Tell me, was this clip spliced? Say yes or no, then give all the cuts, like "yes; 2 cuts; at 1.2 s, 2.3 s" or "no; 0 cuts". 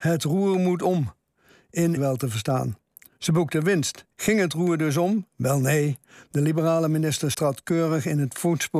yes; 3 cuts; at 2.0 s, 4.1 s, 7.3 s